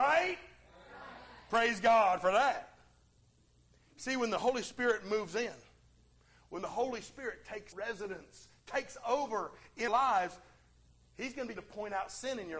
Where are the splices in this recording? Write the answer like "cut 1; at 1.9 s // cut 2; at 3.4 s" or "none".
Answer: cut 1; at 7.7 s // cut 2; at 9.9 s // cut 3; at 11.6 s